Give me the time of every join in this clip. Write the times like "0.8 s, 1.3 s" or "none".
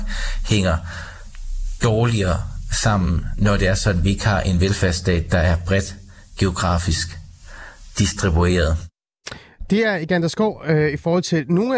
none